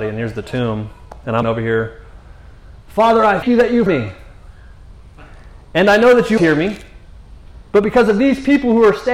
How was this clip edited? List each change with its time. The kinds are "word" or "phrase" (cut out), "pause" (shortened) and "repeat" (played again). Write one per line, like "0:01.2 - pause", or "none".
0:01.4 - word
0:03.4 - word
0:03.9 - word
0:06.4 - word